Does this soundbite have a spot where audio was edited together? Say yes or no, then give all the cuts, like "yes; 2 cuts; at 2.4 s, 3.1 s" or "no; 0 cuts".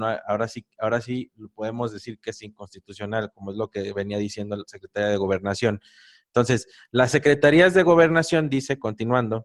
no; 0 cuts